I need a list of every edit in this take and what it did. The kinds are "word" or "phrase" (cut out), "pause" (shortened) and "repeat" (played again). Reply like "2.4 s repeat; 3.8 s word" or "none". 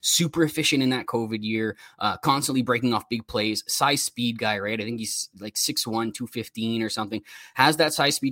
none